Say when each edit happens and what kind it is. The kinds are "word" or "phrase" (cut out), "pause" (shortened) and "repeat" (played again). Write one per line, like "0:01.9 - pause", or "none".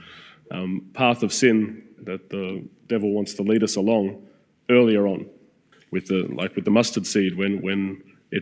0:02.0 - word
0:05.7 - word